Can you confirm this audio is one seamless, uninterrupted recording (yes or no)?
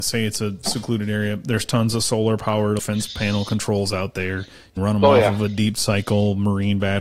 no